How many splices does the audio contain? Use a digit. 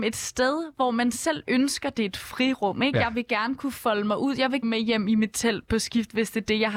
1